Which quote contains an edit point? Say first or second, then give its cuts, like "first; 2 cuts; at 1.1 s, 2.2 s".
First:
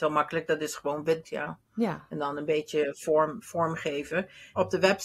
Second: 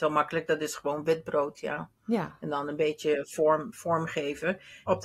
first; 1 cut; at 1.2 s